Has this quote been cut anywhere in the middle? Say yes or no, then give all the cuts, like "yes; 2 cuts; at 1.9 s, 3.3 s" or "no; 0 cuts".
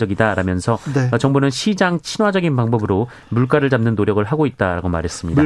no; 0 cuts